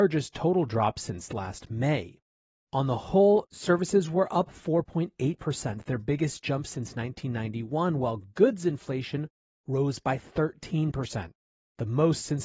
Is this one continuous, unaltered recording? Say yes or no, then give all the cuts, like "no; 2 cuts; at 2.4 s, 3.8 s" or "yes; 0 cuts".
yes; 0 cuts